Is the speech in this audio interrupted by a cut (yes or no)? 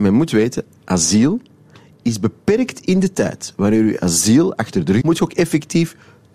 yes